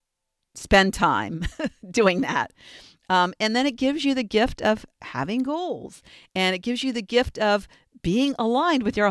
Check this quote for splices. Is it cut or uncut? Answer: uncut